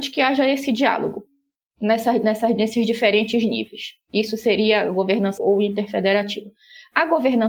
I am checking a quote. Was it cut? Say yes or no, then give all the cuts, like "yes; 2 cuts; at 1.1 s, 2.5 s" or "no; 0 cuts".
yes; 1 cut; at 5.4 s